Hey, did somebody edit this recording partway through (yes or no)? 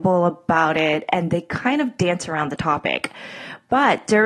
no